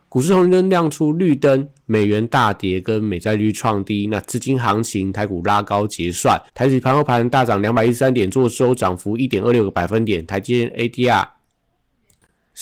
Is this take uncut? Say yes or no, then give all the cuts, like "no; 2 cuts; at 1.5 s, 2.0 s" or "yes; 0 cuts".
no; 1 cut; at 6.5 s